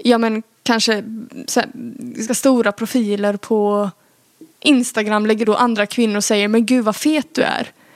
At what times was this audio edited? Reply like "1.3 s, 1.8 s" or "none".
2.3 s, 5.4 s